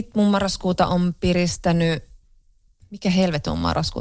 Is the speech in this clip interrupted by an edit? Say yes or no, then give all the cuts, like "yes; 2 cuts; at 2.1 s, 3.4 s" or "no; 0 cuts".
no; 0 cuts